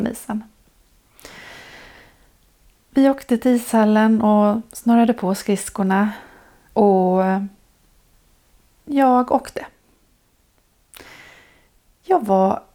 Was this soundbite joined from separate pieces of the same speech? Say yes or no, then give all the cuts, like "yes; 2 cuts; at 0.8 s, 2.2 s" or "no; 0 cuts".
no; 0 cuts